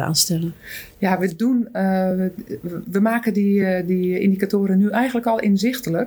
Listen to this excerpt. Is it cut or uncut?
uncut